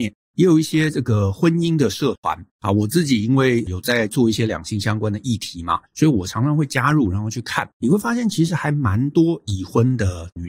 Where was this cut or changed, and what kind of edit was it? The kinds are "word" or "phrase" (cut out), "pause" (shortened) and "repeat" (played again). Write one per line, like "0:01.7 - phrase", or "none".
0:02.5 - pause
0:05.9 - pause
0:07.7 - pause

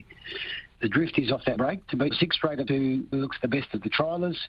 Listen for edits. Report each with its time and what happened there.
0:01.6 - word
0:02.1 - word
0:02.7 - word
0:03.1 - word

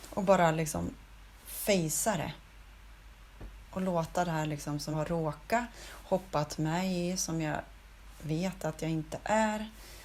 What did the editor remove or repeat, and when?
0:04.9 - word

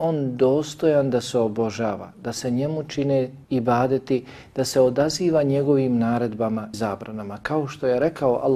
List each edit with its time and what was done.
0:03.4 - pause
0:06.7 - word

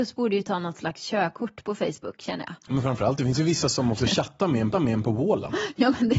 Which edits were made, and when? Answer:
0:04.7 - repeat

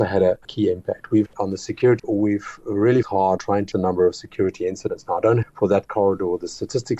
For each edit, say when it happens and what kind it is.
0:01.3 - word
0:02.0 - word
0:03.0 - word
0:03.4 - word
0:03.7 - word
0:05.4 - word

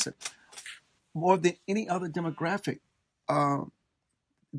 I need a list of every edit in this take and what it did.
none

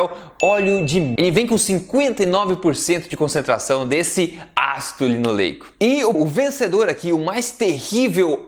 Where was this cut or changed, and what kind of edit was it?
0:01.2 - word
0:06.1 - word

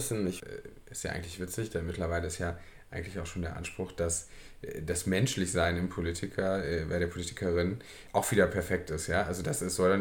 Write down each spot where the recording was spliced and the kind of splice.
none

